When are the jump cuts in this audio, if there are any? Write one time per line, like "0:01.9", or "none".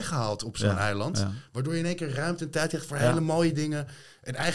none